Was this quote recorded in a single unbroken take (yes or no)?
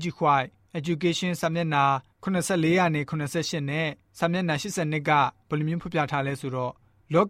yes